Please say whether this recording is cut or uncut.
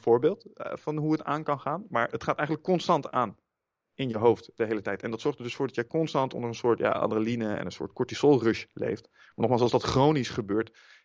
uncut